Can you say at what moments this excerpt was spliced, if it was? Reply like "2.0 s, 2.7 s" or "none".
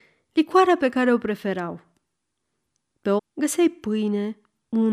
3.2 s